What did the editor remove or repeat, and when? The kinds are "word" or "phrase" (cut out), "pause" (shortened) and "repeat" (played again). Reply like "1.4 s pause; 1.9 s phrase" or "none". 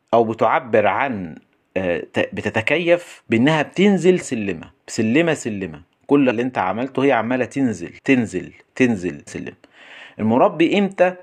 4.2 s word; 4.8 s pause; 6.3 s phrase; 8.0 s pause; 9.3 s word